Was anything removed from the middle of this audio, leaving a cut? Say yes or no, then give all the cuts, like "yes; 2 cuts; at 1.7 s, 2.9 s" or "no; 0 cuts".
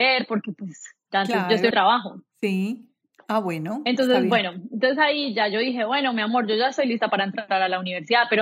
yes; 1 cut; at 1.7 s